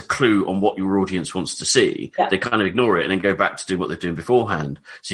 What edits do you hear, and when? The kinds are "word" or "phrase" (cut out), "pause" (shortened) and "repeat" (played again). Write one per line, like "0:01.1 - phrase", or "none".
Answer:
none